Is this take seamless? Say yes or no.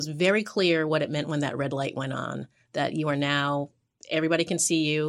yes